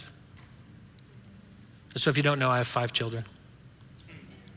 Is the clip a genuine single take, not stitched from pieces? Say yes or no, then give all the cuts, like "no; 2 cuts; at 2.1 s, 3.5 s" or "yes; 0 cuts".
yes; 0 cuts